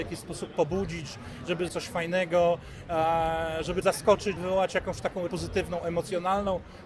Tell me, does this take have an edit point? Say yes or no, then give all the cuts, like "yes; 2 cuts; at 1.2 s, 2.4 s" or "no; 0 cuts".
yes; 4 cuts; at 1.7 s, 3.8 s, 4.4 s, 5.3 s